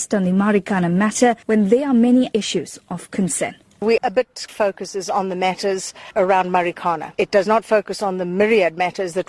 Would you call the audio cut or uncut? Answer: cut